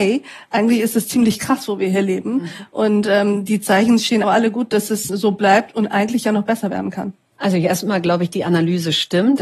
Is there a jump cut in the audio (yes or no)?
yes